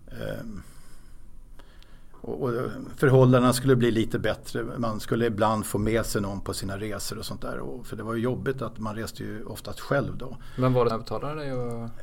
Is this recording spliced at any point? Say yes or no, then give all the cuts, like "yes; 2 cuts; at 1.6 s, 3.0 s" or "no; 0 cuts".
yes; 1 cut; at 10.9 s